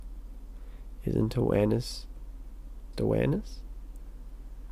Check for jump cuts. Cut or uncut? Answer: cut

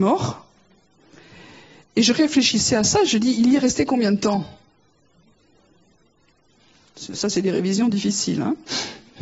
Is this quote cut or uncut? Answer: uncut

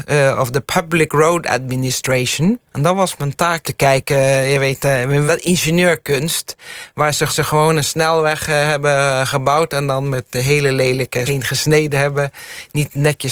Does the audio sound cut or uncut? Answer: cut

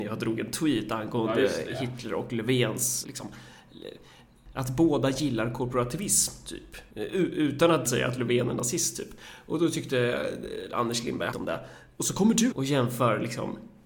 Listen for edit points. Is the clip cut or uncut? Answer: cut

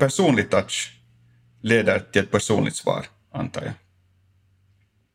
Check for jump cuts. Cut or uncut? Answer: uncut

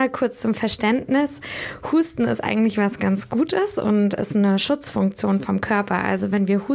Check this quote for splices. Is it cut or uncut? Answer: uncut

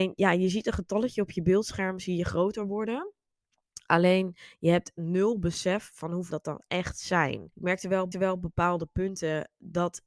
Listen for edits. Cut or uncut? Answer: cut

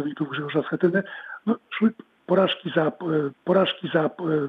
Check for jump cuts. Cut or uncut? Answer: cut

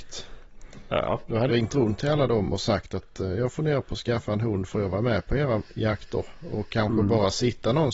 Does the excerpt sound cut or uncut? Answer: cut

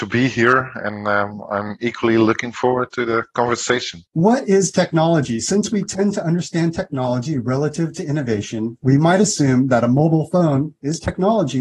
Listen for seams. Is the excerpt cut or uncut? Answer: cut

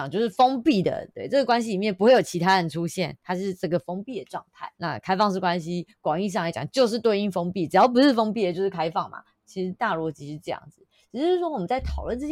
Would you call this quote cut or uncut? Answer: cut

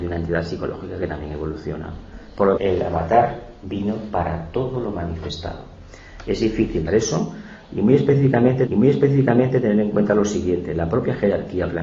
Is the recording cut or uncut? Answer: cut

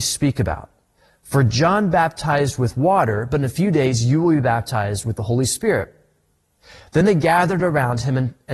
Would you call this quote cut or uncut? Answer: uncut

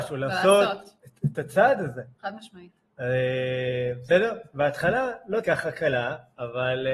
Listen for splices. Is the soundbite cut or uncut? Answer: cut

